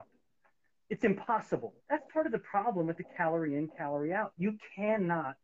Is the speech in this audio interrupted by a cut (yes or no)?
yes